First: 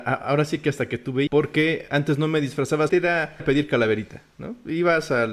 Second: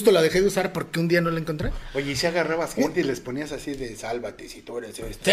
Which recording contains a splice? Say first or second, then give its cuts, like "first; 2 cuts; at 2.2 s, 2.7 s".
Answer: first; 4 cuts; at 1.3 s, 1.9 s, 2.9 s, 3.4 s